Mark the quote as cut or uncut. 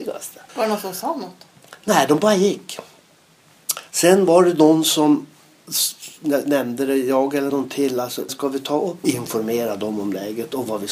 cut